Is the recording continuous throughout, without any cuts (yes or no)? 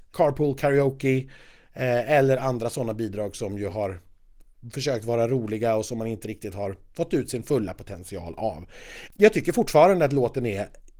yes